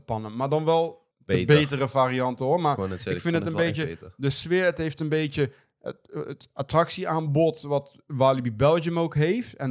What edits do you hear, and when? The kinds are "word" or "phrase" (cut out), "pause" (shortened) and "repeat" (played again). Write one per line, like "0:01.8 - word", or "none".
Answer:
0:01.1 - pause